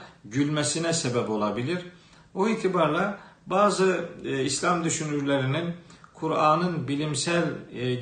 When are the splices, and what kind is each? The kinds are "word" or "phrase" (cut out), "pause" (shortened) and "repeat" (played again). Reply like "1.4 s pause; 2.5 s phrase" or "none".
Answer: none